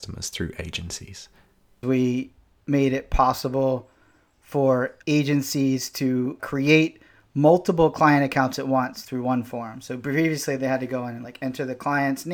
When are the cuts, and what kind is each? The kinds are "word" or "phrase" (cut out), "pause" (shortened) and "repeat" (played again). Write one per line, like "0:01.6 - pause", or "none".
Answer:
none